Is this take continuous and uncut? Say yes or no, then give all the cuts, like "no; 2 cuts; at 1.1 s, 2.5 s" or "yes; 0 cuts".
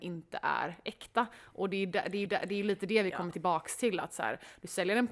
no; 1 cut; at 2.3 s